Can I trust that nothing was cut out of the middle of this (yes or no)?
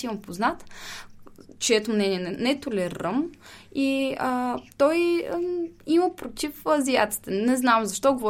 yes